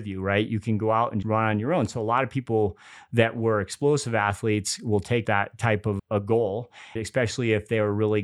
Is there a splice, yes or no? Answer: yes